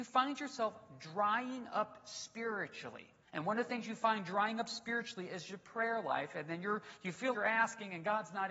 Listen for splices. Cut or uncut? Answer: cut